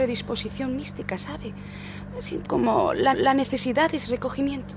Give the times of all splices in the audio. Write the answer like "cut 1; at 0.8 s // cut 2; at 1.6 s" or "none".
cut 1; at 2.5 s // cut 2; at 3.1 s